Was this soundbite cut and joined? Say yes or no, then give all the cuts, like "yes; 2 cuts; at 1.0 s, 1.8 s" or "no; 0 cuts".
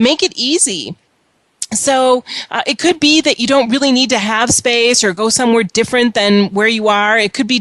no; 0 cuts